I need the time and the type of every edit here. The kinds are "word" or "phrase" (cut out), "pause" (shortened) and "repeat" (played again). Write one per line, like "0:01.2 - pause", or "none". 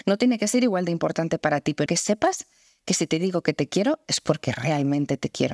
0:01.9 - phrase